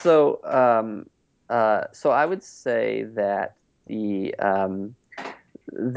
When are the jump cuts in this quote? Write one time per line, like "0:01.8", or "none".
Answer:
none